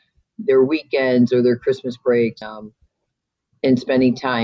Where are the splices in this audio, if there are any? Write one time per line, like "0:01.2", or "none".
0:02.4